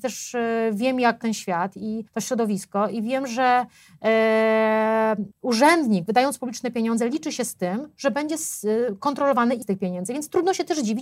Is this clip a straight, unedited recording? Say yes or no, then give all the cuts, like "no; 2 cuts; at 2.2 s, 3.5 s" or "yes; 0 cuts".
no; 4 cuts; at 1.2 s, 2.1 s, 5.3 s, 9.6 s